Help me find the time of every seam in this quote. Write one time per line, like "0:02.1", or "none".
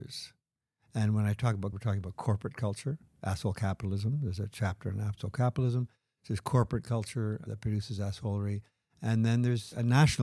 0:01.7